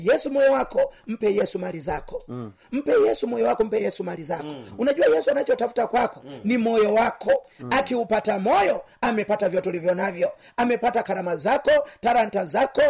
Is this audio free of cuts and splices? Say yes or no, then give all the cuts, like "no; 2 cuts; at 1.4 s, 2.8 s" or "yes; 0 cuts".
yes; 0 cuts